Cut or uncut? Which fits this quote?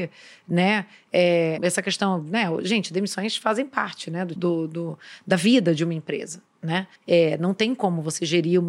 cut